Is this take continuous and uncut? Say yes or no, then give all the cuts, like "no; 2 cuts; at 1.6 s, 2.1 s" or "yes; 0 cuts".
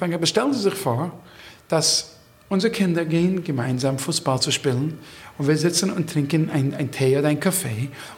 yes; 0 cuts